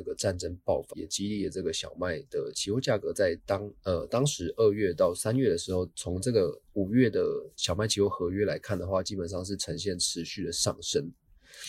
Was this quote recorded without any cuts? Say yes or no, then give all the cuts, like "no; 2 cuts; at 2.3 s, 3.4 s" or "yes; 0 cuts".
no; 3 cuts; at 0.9 s, 6.6 s, 7.5 s